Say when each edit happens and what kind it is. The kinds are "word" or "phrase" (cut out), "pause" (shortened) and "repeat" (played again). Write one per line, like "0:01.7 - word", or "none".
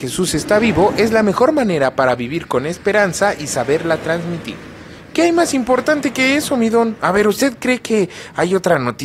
none